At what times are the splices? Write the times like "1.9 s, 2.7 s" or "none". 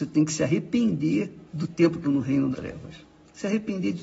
1.5 s, 2.0 s, 2.5 s